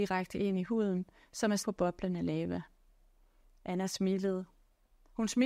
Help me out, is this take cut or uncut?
cut